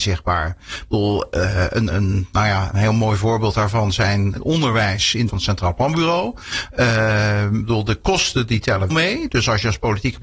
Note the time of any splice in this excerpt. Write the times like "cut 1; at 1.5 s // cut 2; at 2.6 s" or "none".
cut 1; at 1.9 s // cut 2; at 2.7 s // cut 3; at 4.4 s // cut 4; at 5.3 s // cut 5; at 8.9 s

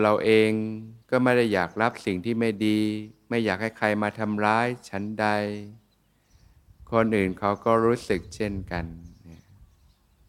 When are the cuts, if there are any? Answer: cut 1; at 1.0 s

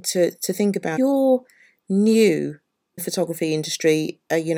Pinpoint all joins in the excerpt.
cut 1; at 1.0 s // cut 2; at 3.0 s

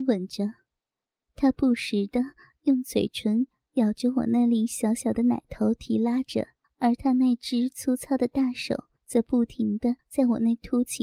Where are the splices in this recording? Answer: cut 1; at 6.6 s // cut 2; at 8.9 s // cut 3; at 10.0 s

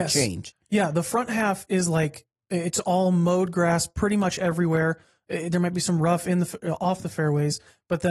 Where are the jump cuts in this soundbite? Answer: none

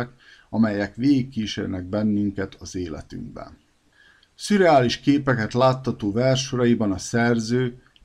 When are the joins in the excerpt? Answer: none

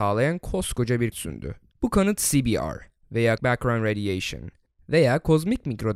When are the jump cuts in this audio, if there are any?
cut 1; at 1.1 s // cut 2; at 3.4 s

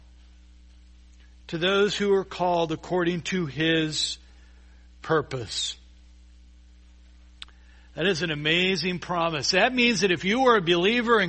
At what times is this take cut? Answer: none

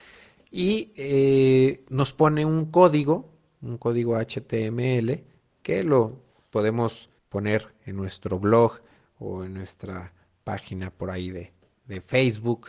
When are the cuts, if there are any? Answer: cut 1; at 7.2 s

